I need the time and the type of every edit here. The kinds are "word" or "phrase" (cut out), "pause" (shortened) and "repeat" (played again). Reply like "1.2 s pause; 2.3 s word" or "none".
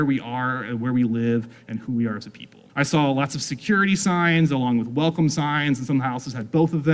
2.7 s pause